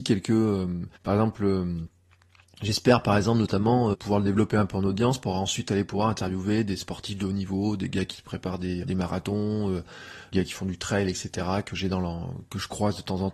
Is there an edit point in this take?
yes; 4 cuts; at 1.0 s, 3.9 s, 8.8 s, 10.3 s

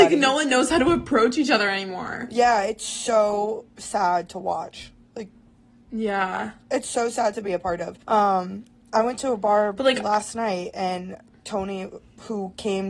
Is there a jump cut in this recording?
yes; 1 cut; at 8.0 s

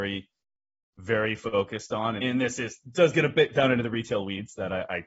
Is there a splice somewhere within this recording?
yes; 1 cut; at 2.2 s

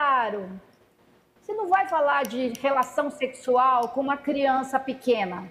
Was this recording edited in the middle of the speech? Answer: no; 0 cuts

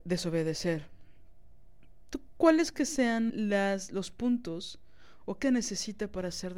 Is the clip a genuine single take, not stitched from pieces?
no; 3 cuts; at 2.7 s, 3.3 s, 5.4 s

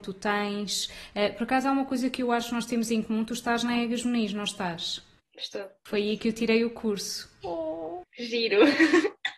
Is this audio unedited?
yes; 0 cuts

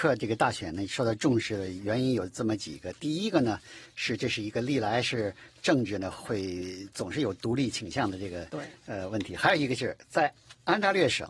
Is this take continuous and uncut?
yes; 0 cuts

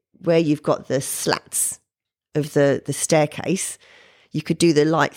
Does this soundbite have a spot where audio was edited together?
no; 0 cuts

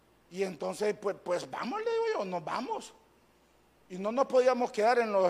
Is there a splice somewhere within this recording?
no; 0 cuts

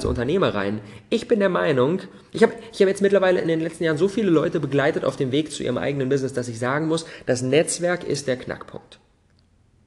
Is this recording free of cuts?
yes; 0 cuts

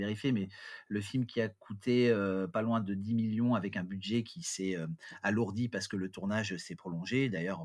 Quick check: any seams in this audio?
no; 0 cuts

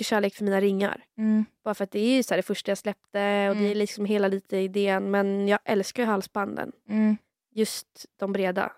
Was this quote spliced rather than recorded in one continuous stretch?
no; 0 cuts

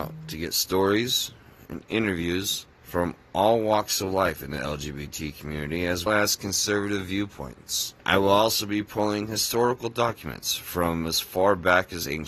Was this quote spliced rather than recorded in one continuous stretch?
yes; 3 cuts; at 2.7 s, 6.1 s, 8.0 s

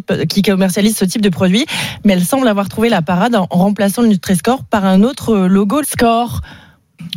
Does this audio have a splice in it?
yes; 1 cut; at 5.8 s

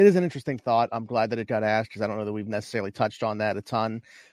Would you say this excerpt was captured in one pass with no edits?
yes; 0 cuts

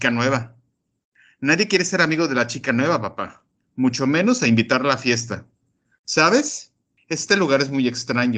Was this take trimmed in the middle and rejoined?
no; 0 cuts

